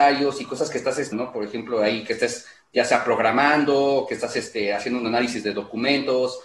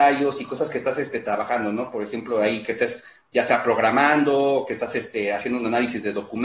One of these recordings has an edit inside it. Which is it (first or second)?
first